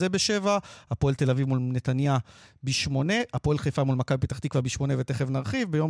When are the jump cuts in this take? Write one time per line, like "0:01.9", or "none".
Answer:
none